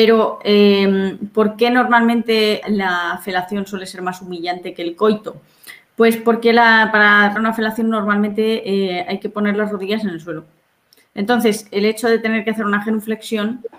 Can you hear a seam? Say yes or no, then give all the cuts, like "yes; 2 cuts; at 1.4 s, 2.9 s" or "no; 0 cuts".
yes; 2 cuts; at 2.6 s, 7.4 s